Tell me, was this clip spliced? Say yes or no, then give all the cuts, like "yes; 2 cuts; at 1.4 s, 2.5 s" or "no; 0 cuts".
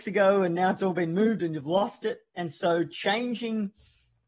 no; 0 cuts